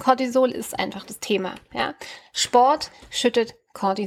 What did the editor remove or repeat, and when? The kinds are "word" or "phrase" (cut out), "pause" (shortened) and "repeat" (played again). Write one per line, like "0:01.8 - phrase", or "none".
none